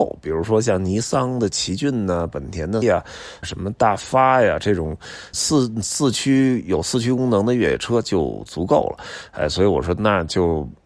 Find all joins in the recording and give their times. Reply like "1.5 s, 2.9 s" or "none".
2.8 s, 3.4 s, 5.3 s